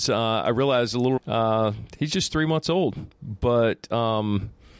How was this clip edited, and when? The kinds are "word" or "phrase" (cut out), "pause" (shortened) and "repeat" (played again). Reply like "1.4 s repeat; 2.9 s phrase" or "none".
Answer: 1.2 s word